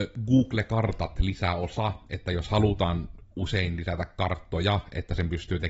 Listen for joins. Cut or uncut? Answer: uncut